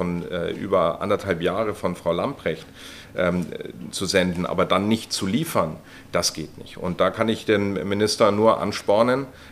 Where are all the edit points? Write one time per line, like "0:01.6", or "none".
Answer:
none